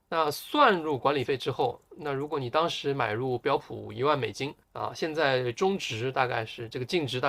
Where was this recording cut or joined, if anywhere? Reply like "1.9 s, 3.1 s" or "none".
4.6 s